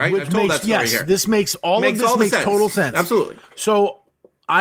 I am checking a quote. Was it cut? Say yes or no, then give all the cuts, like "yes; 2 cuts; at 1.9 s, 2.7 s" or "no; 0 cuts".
no; 0 cuts